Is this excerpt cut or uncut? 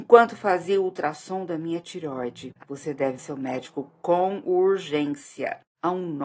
cut